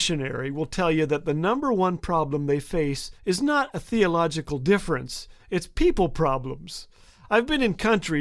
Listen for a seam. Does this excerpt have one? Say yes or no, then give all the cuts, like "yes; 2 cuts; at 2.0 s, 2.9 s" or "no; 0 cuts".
yes; 1 cut; at 3.2 s